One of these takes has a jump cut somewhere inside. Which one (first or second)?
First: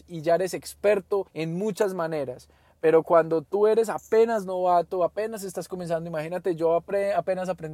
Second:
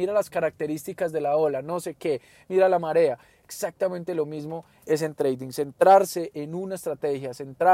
first